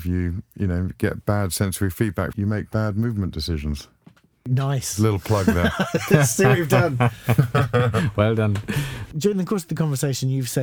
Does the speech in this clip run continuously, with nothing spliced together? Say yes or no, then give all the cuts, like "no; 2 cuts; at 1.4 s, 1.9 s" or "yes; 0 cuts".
no; 1 cut; at 2.3 s